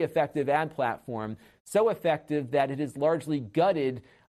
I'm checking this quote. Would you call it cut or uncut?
uncut